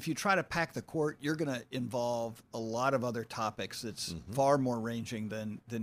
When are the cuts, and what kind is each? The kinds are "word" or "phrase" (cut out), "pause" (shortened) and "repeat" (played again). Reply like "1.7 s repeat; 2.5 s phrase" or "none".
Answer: none